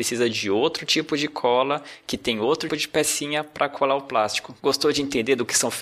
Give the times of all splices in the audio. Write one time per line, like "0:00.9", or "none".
0:02.7